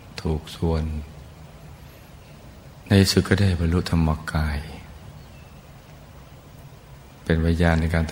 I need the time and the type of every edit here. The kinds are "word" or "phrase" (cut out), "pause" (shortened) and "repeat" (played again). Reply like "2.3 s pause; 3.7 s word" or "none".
none